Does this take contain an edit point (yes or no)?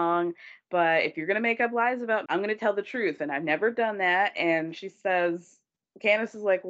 yes